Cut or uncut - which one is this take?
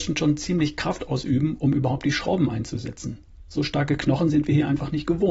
uncut